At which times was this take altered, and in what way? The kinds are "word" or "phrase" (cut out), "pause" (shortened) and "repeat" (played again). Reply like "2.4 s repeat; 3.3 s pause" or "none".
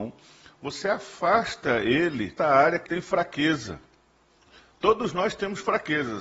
2.4 s word; 2.9 s word